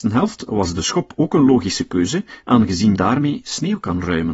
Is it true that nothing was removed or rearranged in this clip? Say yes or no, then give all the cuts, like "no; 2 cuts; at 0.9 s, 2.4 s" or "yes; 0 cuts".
no; 1 cut; at 3.0 s